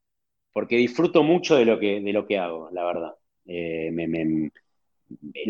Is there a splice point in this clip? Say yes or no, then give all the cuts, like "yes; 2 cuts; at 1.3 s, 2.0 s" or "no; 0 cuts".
no; 0 cuts